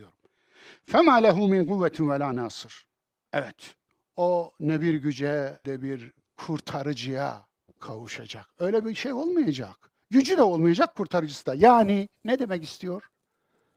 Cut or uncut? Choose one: cut